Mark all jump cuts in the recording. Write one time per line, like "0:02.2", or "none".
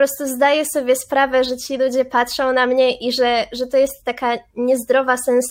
none